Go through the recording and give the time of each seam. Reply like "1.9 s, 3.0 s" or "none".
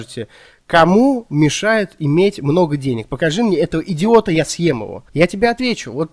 5.1 s